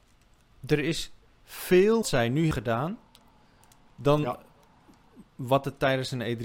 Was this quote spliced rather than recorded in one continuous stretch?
yes; 2 cuts; at 2.0 s, 2.5 s

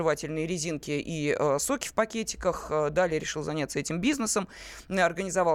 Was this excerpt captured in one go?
yes; 0 cuts

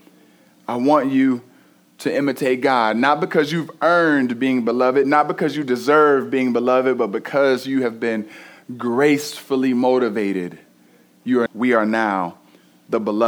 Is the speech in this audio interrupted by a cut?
yes; 1 cut; at 11.5 s

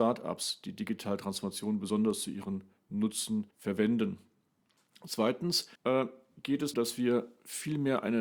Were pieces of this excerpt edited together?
yes; 3 cuts; at 3.5 s, 5.8 s, 6.7 s

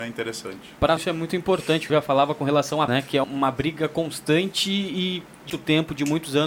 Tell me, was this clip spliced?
yes; 5 cuts; at 1.0 s, 1.9 s, 2.9 s, 3.2 s, 5.5 s

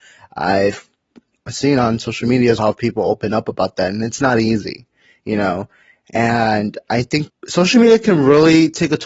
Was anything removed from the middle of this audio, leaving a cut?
yes; 2 cuts; at 2.6 s, 7.3 s

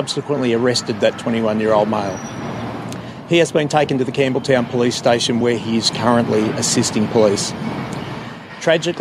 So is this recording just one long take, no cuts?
yes; 0 cuts

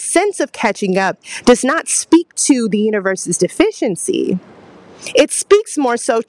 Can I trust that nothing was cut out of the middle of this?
yes; 0 cuts

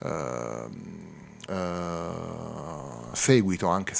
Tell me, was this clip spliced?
yes; 1 cut; at 1.5 s

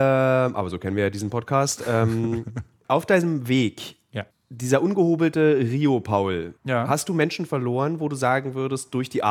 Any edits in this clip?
yes; 3 cuts; at 2.8 s, 4.3 s, 6.6 s

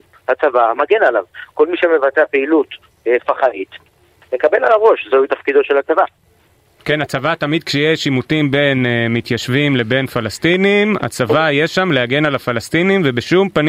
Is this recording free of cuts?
yes; 0 cuts

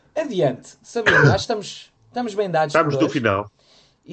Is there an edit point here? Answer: yes; 1 cut; at 2.0 s

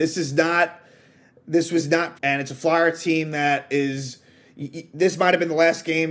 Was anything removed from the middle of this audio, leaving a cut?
yes; 1 cut; at 2.1 s

